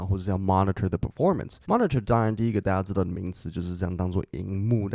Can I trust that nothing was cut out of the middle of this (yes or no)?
no